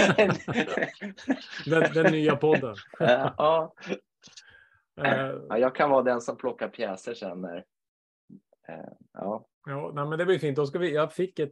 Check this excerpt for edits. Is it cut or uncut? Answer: cut